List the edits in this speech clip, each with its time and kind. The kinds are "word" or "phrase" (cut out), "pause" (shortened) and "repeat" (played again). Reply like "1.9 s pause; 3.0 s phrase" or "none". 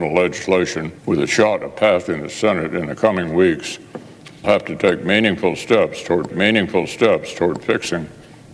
1.0 s pause; 4.4 s word; 6.3 s repeat